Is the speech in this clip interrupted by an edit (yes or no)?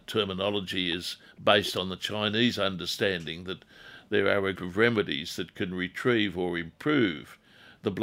yes